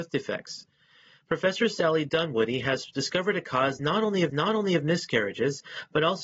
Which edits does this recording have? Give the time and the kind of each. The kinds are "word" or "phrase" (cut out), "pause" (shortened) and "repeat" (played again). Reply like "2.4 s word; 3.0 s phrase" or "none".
4.3 s repeat